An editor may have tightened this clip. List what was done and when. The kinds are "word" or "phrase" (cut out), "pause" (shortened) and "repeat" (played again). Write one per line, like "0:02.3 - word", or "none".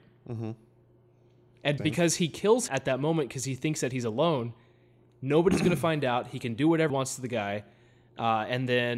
0:01.8 - word
0:02.7 - word
0:06.9 - word